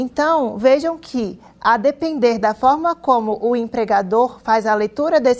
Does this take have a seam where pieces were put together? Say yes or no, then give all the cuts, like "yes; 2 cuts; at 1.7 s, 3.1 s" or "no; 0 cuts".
no; 0 cuts